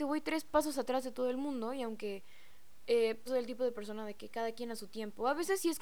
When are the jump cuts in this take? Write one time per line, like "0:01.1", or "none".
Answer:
0:03.3